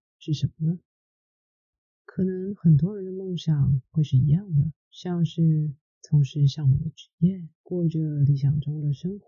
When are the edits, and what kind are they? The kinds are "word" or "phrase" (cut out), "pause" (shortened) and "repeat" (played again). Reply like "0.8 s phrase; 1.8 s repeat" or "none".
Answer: 4.8 s pause; 7.5 s pause